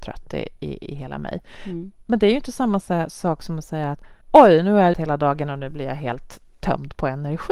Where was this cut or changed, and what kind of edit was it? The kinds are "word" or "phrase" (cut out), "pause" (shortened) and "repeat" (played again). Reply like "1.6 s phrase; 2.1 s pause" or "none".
4.2 s pause; 4.9 s word